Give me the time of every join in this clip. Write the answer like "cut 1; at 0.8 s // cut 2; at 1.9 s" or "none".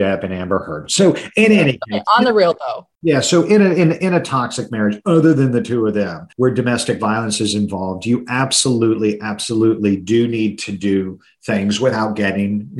cut 1; at 2.9 s // cut 2; at 6.3 s